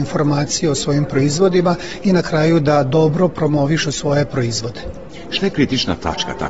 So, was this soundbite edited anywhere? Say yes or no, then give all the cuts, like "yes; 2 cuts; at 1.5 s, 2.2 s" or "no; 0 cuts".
no; 0 cuts